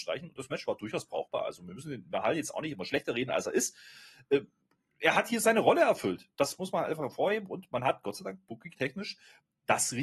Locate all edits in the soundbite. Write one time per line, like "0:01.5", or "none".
none